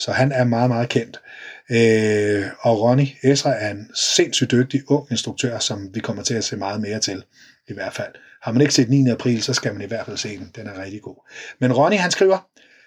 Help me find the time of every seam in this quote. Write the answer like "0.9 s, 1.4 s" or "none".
none